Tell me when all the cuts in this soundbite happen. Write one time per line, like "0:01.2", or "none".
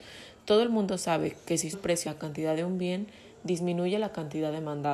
0:01.7
0:02.1